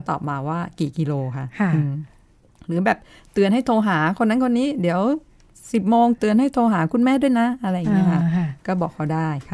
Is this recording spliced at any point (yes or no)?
no